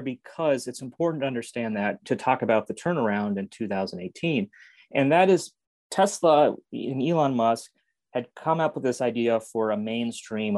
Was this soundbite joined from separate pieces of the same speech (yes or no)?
yes